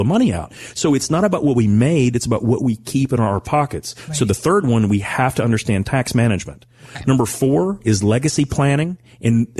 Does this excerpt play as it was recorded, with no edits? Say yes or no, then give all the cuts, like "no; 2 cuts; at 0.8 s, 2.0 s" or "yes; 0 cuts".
yes; 0 cuts